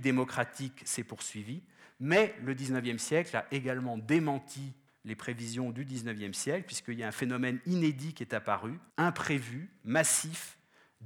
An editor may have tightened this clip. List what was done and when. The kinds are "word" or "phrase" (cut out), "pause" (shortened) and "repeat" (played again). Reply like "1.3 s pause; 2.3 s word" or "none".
4.9 s word; 8.9 s pause